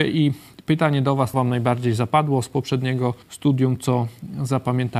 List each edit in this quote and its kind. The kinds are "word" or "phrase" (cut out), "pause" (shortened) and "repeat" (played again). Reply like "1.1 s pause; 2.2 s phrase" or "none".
1.3 s word; 3.2 s pause